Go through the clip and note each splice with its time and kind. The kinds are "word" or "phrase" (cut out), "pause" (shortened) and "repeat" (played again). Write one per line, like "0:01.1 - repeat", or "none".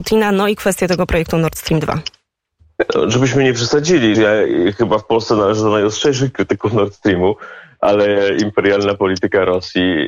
0:04.1 - word

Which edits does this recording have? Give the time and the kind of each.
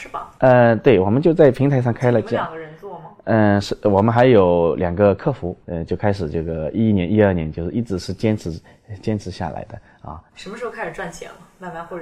0:05.6 - pause
0:10.3 - pause

